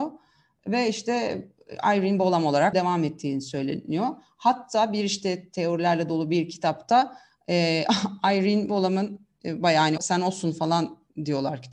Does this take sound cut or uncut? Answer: cut